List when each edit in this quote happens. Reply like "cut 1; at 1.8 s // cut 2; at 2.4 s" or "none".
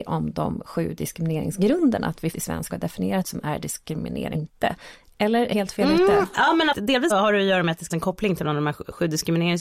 cut 1; at 2.3 s // cut 2; at 2.7 s // cut 3; at 3.2 s // cut 4; at 4.3 s // cut 5; at 5.5 s // cut 6; at 6.7 s // cut 7; at 7.1 s // cut 8; at 7.9 s